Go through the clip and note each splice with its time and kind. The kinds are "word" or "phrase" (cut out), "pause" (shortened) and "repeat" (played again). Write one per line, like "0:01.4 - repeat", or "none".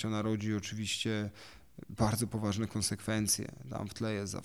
none